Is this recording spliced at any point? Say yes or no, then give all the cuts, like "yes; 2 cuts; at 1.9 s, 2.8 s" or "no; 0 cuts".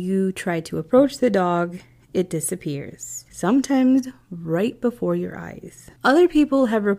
no; 0 cuts